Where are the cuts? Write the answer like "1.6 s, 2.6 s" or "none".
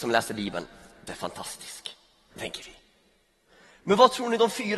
1.1 s

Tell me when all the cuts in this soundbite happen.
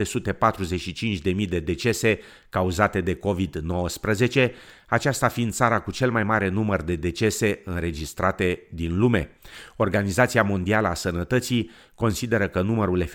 none

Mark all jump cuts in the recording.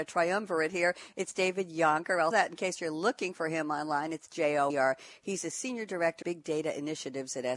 2.3 s, 4.7 s, 6.2 s

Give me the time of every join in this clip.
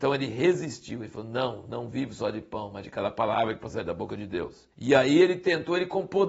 4.7 s

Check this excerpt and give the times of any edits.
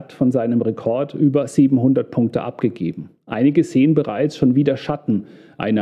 none

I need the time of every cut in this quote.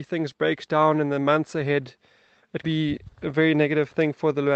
2.6 s

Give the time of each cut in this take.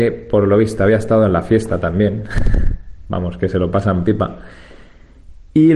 none

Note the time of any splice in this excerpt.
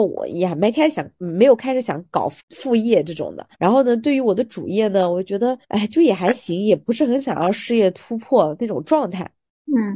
2.4 s, 3.5 s, 5.6 s

